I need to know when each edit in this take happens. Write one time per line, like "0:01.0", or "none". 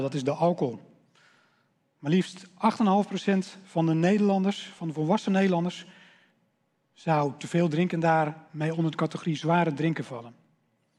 none